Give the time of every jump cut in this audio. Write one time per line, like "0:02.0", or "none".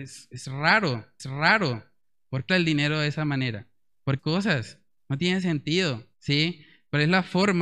0:01.2
0:02.5
0:04.2
0:06.1